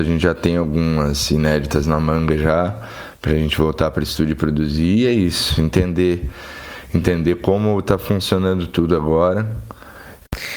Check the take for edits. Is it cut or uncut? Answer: uncut